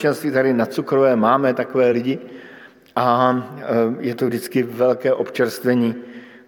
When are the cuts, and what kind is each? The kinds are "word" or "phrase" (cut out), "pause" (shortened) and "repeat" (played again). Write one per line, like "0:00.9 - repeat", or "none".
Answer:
none